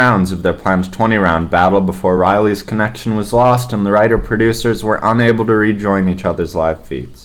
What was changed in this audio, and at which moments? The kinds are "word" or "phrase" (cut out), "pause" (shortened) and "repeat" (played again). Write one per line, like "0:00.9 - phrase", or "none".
none

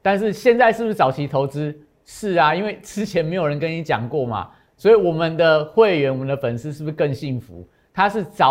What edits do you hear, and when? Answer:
none

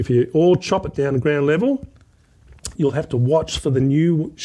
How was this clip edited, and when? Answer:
0:02.8 - word

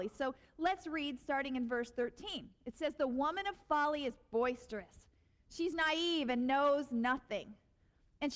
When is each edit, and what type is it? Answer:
none

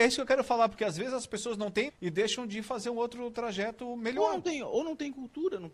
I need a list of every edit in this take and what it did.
0:01.9 - word

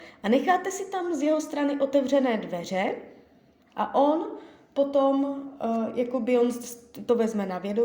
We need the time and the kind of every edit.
none

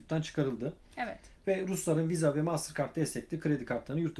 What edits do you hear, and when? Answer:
none

